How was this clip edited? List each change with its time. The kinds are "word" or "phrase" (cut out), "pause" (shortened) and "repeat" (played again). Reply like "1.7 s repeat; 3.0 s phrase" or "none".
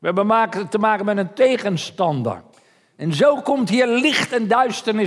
2.5 s pause